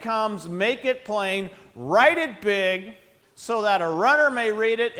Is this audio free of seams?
no; 1 cut; at 3.2 s

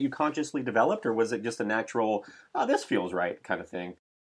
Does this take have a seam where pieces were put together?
no; 0 cuts

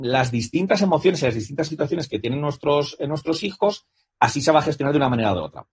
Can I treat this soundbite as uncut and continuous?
yes; 0 cuts

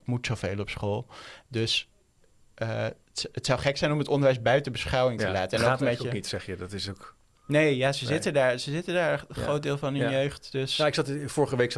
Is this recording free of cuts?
yes; 0 cuts

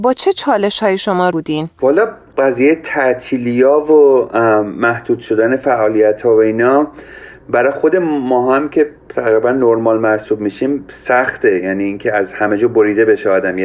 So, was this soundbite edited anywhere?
yes; 2 cuts; at 1.3 s, 9.0 s

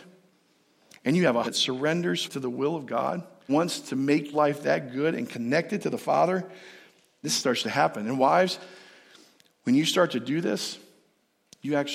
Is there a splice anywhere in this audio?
yes; 5 cuts; at 1.4 s, 2.3 s, 3.5 s, 4.3 s, 7.2 s

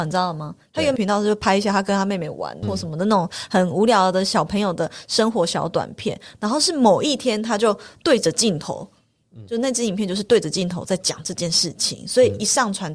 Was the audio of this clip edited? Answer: yes; 2 cuts; at 1.0 s, 2.6 s

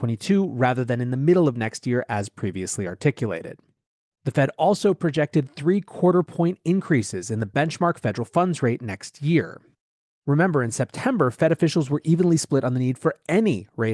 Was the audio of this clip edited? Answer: no; 0 cuts

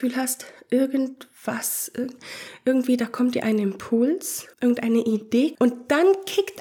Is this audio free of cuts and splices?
no; 2 cuts; at 4.5 s, 5.5 s

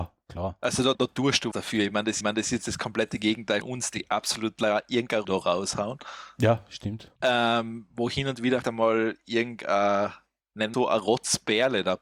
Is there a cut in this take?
yes; 9 cuts; at 0.9 s, 1.5 s, 2.2 s, 3.6 s, 5.2 s, 7.2 s, 8.6 s, 10.4 s, 10.7 s

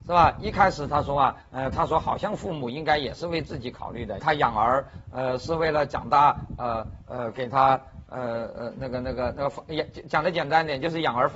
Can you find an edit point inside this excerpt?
yes; 2 cuts; at 1.4 s, 4.2 s

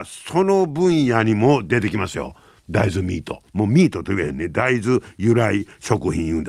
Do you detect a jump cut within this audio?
yes; 1 cut; at 3.5 s

